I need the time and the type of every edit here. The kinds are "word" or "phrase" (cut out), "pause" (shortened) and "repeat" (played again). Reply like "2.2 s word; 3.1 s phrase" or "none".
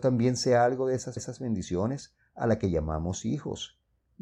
1.2 s repeat